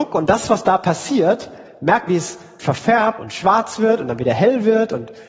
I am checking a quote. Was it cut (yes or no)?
yes